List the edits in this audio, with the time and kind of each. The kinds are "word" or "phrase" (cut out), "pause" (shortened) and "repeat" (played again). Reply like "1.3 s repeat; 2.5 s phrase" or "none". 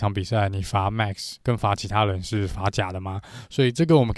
1.4 s pause